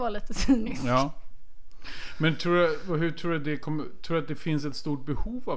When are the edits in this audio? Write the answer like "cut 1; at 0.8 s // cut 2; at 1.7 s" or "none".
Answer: none